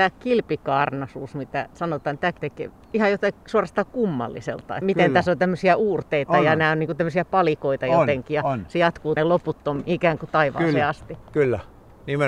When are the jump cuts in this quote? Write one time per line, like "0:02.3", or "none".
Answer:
0:02.4
0:02.8
0:04.8
0:09.2